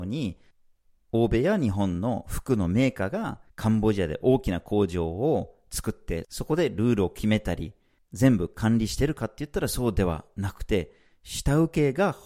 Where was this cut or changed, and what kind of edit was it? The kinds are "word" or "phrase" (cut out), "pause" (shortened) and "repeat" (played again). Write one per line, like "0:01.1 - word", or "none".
0:03.5 - pause